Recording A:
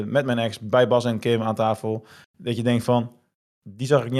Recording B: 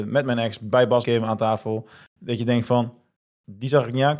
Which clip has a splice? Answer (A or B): B